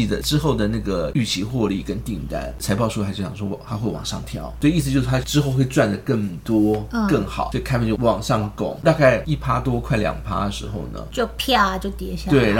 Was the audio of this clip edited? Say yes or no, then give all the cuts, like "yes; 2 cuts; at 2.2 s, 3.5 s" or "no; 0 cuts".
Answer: no; 0 cuts